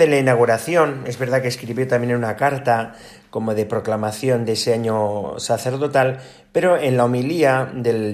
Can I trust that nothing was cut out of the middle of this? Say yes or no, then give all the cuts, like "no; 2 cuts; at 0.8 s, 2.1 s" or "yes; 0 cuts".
yes; 0 cuts